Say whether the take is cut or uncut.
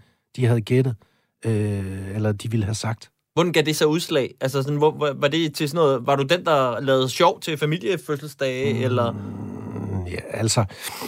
uncut